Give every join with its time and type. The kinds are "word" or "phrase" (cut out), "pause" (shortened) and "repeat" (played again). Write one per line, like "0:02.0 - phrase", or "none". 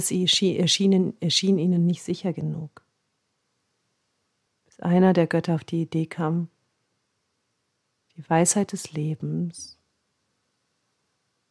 none